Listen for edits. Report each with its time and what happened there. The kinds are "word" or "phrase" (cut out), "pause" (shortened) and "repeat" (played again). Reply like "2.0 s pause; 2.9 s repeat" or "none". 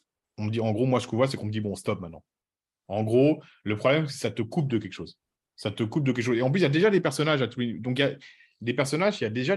none

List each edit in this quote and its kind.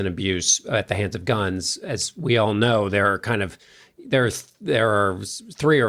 none

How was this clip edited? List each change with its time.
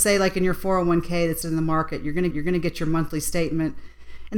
1.4 s word; 2.3 s repeat

